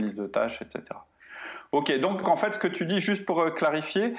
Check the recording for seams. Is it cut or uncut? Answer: cut